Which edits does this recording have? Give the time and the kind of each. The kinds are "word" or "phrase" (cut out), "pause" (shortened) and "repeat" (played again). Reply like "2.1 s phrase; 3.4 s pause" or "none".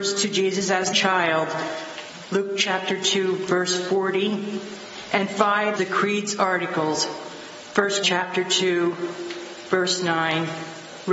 0.9 s phrase; 5.8 s word; 8.0 s word

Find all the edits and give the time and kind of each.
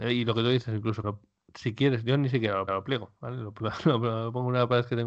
1.0 s word; 2.7 s repeat

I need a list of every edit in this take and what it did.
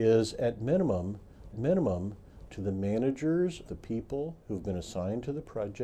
1.5 s repeat; 3.7 s word; 4.4 s pause

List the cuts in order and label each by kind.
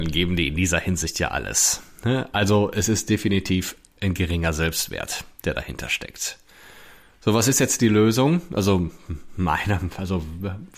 none

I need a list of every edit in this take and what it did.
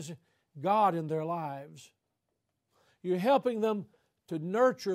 none

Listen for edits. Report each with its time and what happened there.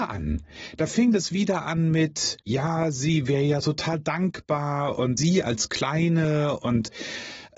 2.4 s pause; 5.2 s word

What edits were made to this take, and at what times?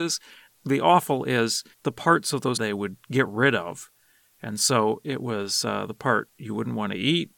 1.7 s pause; 2.6 s phrase

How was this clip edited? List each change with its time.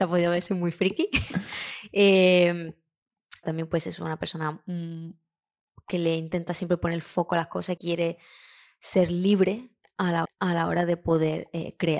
3.4 s phrase; 7.8 s word; 10.2 s repeat

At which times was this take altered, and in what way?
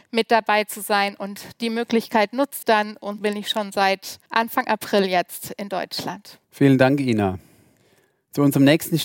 2.6 s word; 3.2 s word; 4.3 s pause; 6.4 s pause

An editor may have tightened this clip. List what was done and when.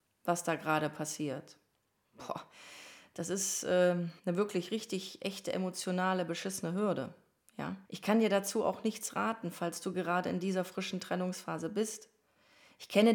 1.9 s pause; 4.2 s pause; 7.8 s pause

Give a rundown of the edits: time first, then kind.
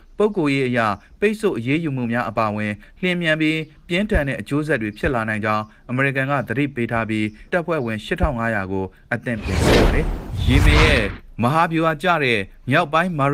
7.5 s word

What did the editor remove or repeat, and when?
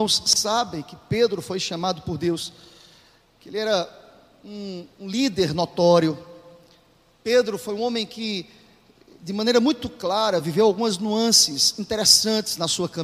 none

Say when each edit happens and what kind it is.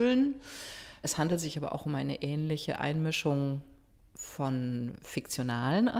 4.0 s pause

